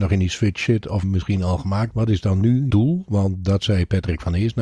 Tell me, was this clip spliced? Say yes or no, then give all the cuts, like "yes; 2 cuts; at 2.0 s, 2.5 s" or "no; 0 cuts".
yes; 3 cuts; at 1.0 s, 1.9 s, 2.7 s